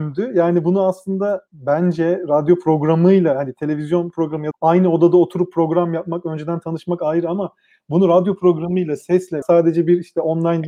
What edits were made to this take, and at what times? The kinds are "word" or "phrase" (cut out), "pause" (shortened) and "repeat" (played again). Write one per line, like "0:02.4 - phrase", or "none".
0:04.5 - word
0:09.4 - word